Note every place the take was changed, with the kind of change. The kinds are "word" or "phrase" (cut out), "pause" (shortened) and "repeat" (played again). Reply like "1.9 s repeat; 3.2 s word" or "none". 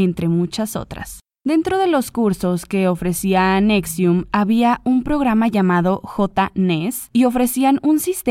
none